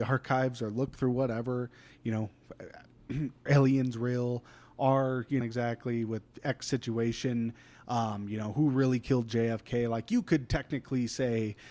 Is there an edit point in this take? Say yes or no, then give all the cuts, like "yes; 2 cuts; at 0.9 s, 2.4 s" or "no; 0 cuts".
yes; 2 cuts; at 3.5 s, 5.4 s